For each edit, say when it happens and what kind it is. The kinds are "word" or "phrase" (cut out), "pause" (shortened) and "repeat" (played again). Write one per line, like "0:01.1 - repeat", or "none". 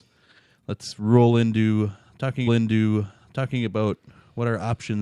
0:02.5 - repeat